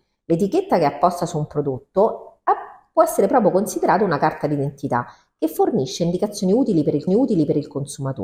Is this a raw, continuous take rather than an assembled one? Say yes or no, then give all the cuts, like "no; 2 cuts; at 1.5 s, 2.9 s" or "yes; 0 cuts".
no; 1 cut; at 7.1 s